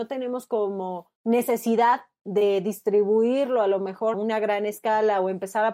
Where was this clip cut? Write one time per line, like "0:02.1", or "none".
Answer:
0:01.2
0:04.1